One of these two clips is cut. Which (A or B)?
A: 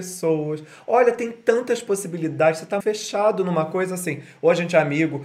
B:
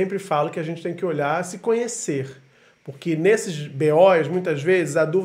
A